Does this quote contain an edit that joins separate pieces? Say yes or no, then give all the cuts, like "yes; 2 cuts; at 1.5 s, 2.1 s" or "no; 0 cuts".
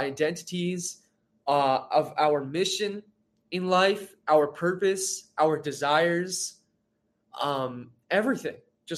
no; 0 cuts